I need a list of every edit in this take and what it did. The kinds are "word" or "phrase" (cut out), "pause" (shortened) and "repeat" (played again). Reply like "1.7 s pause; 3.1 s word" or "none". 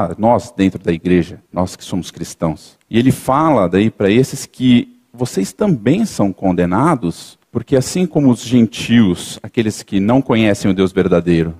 1.5 s pause; 2.8 s pause; 7.4 s pause